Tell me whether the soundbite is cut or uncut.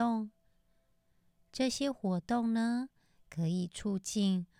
uncut